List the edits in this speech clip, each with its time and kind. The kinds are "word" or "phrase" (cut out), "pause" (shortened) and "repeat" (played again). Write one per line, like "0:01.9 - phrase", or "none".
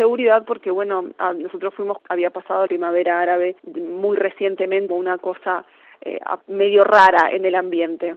0:02.0 - word
0:02.7 - phrase
0:03.6 - pause
0:04.9 - phrase
0:06.4 - pause

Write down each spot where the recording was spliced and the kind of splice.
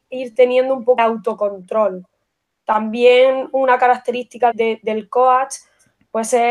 0:01.0 - word
0:04.5 - word

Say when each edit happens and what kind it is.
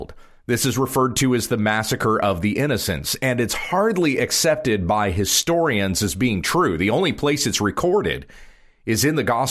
none

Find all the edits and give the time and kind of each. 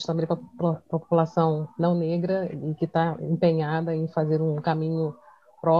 none

